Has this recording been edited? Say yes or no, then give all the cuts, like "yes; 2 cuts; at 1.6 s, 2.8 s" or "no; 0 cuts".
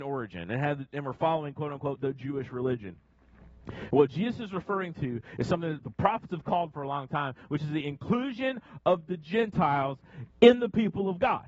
yes; 3 cuts; at 5.8 s, 6.7 s, 10.3 s